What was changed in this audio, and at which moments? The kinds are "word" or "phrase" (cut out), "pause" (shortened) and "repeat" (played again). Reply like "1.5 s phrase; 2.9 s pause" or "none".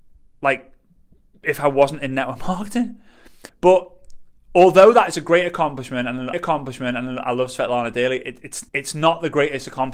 3.5 s pause; 6.3 s repeat; 8.7 s pause